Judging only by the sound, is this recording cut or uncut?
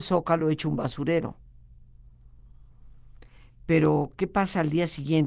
uncut